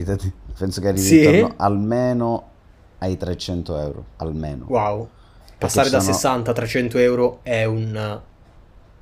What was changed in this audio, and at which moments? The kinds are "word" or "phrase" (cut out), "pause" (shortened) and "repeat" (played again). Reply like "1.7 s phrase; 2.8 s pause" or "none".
none